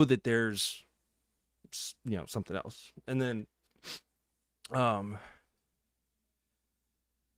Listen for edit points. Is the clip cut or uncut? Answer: uncut